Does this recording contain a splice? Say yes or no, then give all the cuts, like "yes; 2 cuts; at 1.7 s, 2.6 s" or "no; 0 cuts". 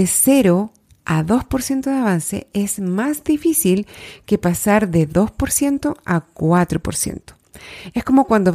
no; 0 cuts